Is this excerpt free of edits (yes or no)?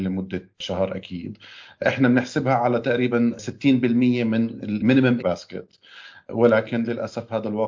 no